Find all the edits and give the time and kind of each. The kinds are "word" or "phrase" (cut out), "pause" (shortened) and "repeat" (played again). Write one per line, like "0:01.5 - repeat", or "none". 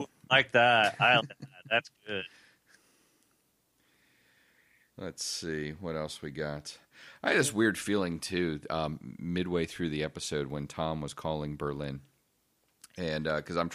0:01.2 - word